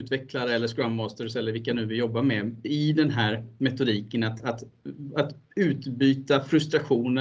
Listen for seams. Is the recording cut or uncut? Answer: uncut